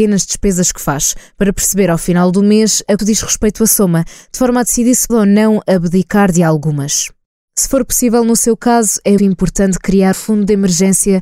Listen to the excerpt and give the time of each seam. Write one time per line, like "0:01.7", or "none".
0:03.0
0:05.1
0:09.2
0:10.1